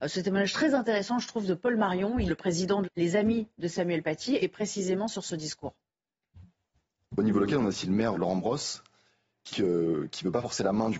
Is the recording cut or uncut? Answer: cut